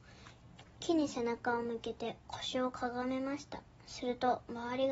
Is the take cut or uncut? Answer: cut